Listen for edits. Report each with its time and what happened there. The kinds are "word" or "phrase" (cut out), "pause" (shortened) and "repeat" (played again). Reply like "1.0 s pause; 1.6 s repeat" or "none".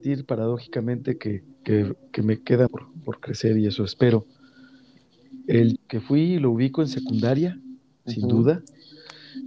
1.5 s pause; 2.7 s word; 5.8 s word